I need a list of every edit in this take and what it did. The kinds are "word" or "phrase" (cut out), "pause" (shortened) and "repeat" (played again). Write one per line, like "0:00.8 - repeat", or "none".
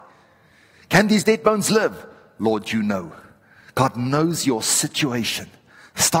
none